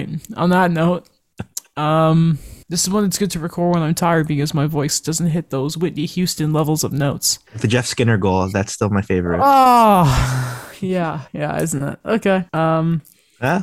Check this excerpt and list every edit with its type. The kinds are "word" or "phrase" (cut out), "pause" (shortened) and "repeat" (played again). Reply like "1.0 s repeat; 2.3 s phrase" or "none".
2.6 s pause; 7.5 s pause; 11.3 s pause; 12.5 s pause

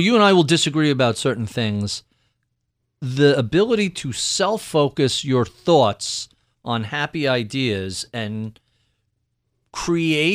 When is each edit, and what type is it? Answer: none

